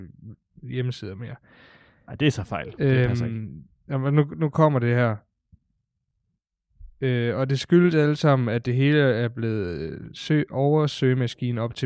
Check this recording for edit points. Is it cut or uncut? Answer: uncut